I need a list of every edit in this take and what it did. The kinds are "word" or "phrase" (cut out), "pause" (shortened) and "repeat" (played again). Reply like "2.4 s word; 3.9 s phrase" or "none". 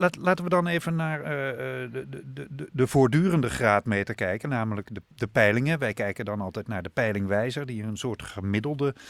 none